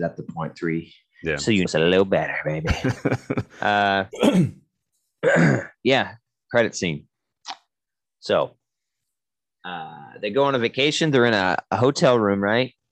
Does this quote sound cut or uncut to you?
cut